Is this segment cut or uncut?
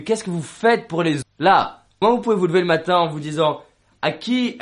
cut